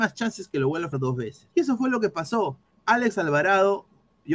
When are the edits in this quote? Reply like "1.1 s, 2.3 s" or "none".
0.9 s, 1.5 s, 2.6 s